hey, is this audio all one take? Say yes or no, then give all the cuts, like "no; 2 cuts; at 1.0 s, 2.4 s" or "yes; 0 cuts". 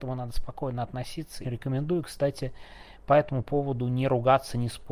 no; 1 cut; at 1.4 s